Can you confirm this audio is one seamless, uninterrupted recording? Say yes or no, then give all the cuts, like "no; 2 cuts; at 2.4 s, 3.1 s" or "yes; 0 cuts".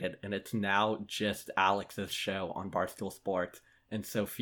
yes; 0 cuts